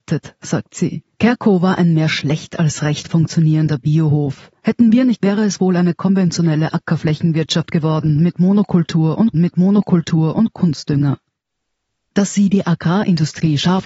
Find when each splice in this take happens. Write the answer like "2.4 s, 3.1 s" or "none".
1.1 s, 5.2 s, 9.3 s